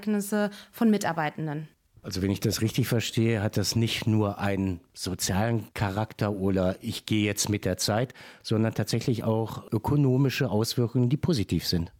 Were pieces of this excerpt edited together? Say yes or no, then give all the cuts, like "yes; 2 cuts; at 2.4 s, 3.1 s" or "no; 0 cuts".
no; 0 cuts